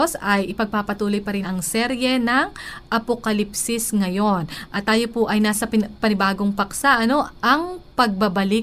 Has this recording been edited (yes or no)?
yes